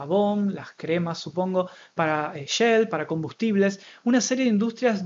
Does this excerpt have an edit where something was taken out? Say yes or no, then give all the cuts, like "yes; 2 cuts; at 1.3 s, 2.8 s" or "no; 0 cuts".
no; 0 cuts